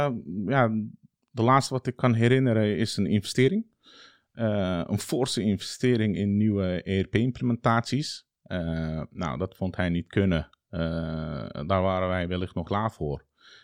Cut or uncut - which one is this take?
cut